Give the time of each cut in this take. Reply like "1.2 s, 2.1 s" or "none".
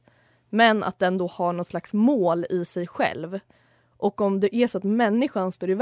none